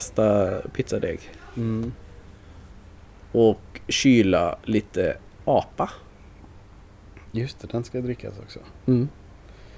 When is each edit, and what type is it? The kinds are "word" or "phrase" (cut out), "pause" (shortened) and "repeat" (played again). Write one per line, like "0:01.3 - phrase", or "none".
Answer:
none